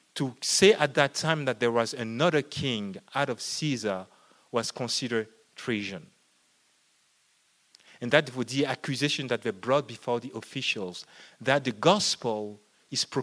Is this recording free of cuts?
yes; 0 cuts

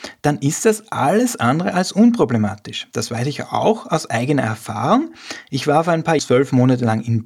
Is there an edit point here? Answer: yes; 1 cut; at 6.2 s

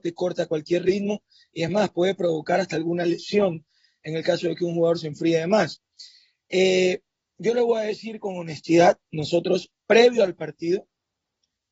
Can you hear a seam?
no; 0 cuts

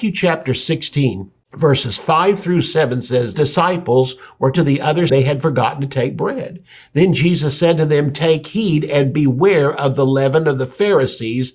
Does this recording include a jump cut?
yes; 4 cuts; at 1.4 s, 3.3 s, 4.5 s, 5.1 s

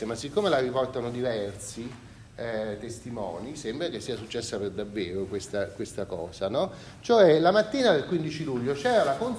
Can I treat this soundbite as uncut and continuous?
no; 1 cut; at 2.3 s

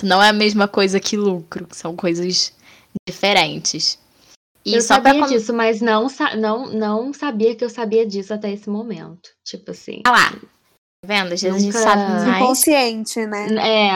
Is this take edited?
no; 0 cuts

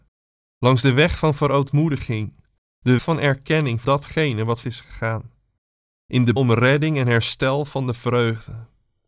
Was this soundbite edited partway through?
yes; 4 cuts; at 3.0 s, 3.8 s, 4.6 s, 6.4 s

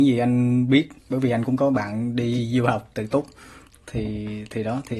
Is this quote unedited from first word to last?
no; 1 cut; at 1.0 s

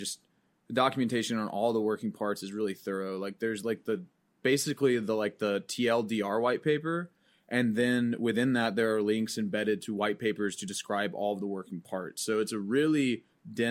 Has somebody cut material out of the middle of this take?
no; 0 cuts

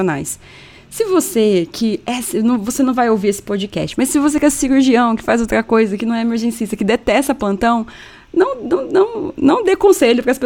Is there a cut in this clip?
no; 0 cuts

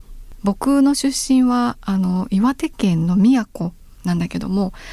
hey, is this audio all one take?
yes; 0 cuts

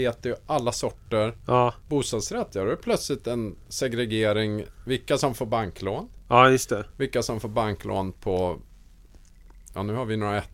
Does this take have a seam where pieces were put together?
no; 0 cuts

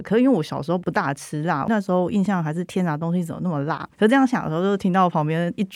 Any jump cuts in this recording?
yes; 1 cut; at 3.9 s

